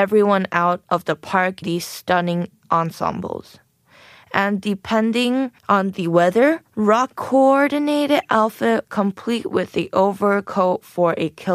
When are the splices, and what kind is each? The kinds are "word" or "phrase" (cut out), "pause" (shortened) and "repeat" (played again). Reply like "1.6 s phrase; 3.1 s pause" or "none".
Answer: 1.6 s word; 5.6 s pause; 7.1 s word; 8.8 s phrase